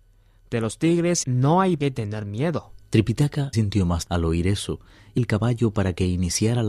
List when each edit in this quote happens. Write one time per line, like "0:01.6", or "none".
0:01.2
0:01.8
0:03.5
0:04.0
0:05.2